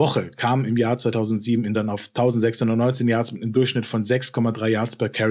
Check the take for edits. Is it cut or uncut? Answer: cut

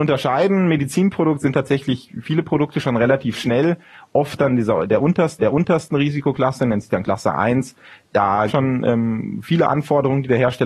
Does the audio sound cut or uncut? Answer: cut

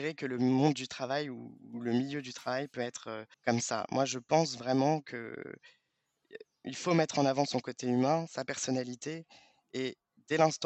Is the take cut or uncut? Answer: cut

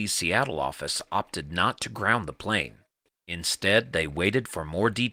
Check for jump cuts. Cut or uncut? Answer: uncut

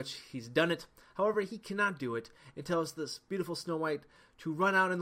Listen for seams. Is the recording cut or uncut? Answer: uncut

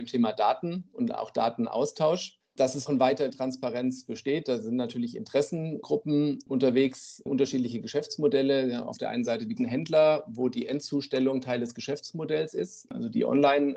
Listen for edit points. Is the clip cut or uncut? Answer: cut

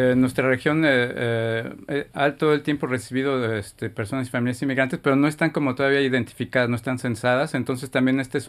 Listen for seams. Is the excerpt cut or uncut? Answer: cut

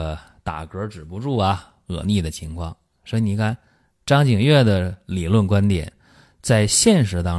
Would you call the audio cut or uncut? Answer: uncut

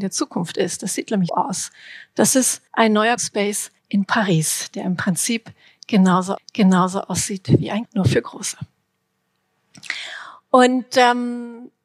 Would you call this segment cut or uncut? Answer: cut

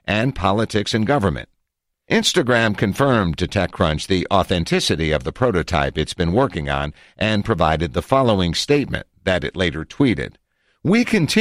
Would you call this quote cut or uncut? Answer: uncut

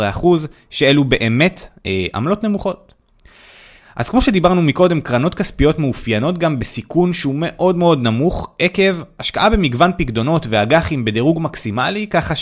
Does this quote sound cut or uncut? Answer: uncut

